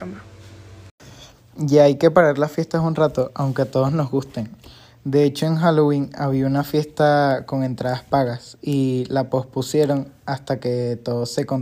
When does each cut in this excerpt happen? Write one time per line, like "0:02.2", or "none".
none